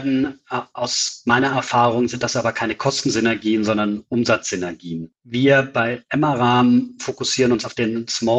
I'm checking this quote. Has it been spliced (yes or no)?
no